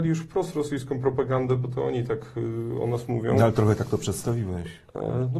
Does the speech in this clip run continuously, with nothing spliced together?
yes; 0 cuts

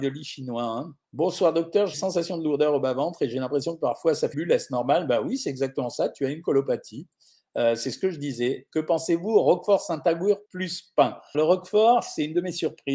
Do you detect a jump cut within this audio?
yes; 5 cuts; at 1.0 s, 1.9 s, 4.3 s, 10.5 s, 11.3 s

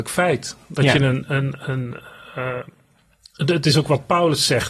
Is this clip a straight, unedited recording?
yes; 0 cuts

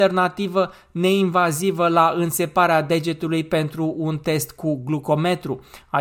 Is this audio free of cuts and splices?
yes; 0 cuts

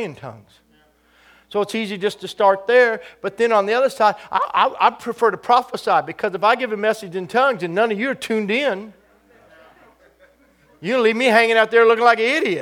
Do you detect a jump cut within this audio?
no; 0 cuts

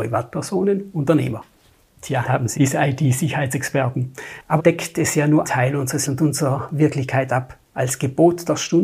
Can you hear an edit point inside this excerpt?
yes; 6 cuts; at 0.9 s, 2.2 s, 2.5 s, 4.6 s, 5.4 s, 6.0 s

